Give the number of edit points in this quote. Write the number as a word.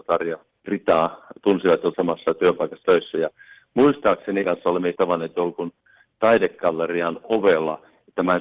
four